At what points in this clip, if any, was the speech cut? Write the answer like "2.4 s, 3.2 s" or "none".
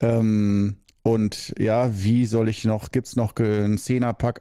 none